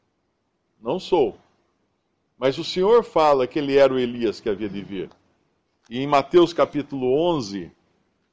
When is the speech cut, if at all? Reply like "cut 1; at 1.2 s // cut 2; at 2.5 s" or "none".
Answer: none